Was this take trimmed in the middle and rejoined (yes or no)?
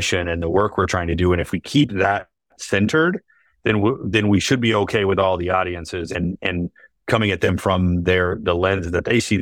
no